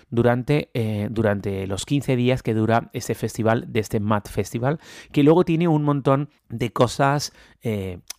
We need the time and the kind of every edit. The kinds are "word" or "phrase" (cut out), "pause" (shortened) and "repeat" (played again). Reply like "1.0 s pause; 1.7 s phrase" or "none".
6.4 s pause